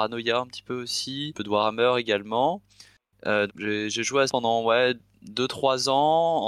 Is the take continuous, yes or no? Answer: no